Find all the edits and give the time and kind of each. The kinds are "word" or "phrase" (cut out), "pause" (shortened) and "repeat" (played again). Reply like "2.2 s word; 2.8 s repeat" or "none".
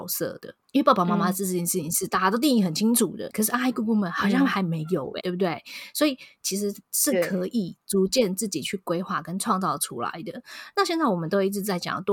3.3 s word; 5.2 s word